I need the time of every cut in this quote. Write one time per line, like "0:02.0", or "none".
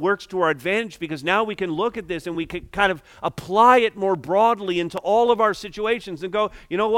none

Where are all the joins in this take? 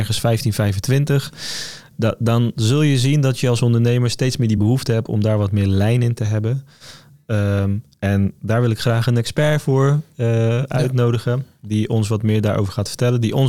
none

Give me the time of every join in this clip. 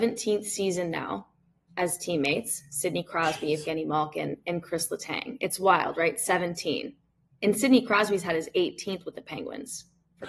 none

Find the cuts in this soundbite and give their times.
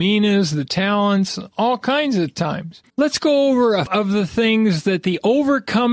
0:02.9
0:03.9

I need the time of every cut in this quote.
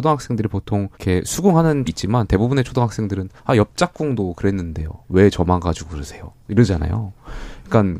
0:00.9
0:01.9
0:03.4
0:05.0

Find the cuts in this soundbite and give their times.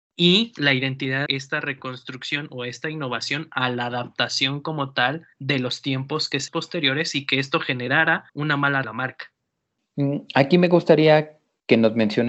0:01.3
0:05.3
0:06.5
0:08.3
0:08.8

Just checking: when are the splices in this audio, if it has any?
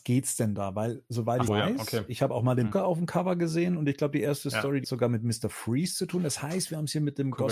0:01.5
0:02.7
0:04.8

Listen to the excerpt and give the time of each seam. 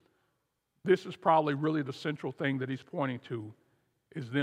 none

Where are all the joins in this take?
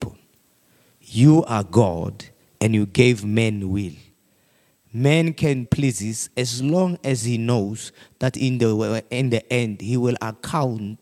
0:05.6

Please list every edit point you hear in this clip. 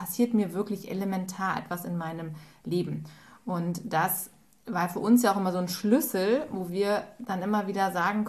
none

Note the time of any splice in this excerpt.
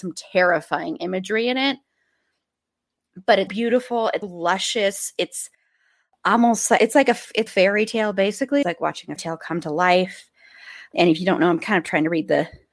0:03.5
0:04.2
0:06.8
0:07.5
0:08.6
0:09.2
0:10.9

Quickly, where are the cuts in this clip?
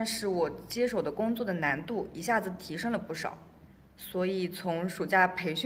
none

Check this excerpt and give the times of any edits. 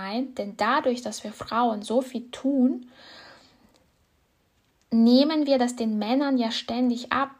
none

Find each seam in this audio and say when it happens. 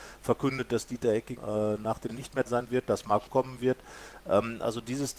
0:01.4
0:02.1
0:02.5
0:03.3

